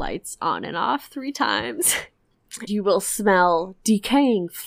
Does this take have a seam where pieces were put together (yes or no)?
yes